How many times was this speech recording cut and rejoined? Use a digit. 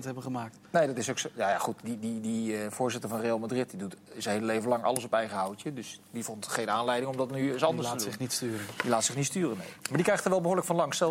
1